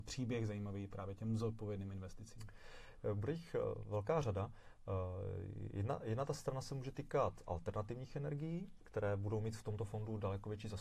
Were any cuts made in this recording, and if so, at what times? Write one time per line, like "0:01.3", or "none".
none